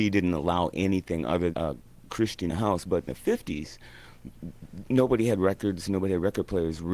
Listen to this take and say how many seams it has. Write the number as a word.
three